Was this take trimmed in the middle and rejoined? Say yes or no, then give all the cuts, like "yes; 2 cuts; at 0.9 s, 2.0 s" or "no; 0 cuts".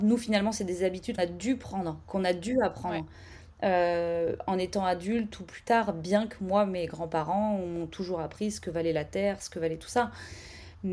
yes; 1 cut; at 1.2 s